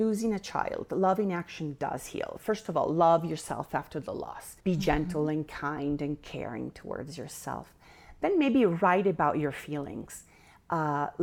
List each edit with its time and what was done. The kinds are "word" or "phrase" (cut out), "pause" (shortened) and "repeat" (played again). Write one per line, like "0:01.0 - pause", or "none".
0:04.6 - pause